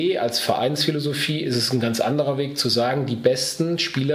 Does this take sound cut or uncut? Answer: uncut